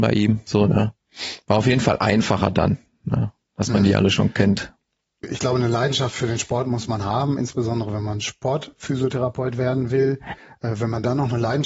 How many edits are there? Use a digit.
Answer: 1